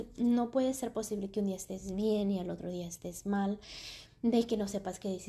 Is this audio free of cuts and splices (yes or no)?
yes